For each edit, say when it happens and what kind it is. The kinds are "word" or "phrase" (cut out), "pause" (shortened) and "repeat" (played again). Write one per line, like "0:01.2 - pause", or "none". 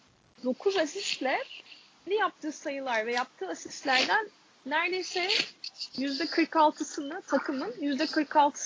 0:02.1 - word